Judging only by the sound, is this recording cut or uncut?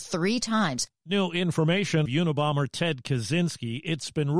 cut